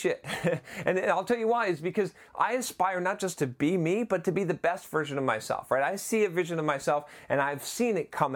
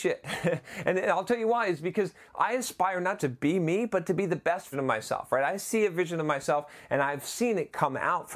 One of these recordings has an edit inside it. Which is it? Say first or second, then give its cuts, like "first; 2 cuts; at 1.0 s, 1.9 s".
second; 2 cuts; at 3.2 s, 4.7 s